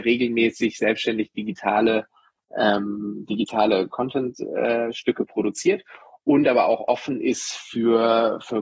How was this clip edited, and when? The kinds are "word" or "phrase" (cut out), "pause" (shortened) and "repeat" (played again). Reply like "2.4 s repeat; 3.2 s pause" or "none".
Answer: none